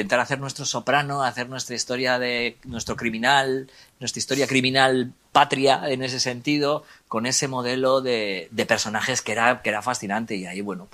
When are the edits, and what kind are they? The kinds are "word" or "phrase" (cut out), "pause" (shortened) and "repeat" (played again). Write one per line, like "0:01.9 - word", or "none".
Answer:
none